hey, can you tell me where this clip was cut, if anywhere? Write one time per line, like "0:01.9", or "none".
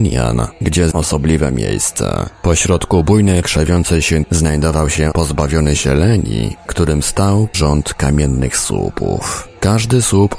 0:00.9
0:03.4
0:04.2
0:05.1
0:06.7
0:07.5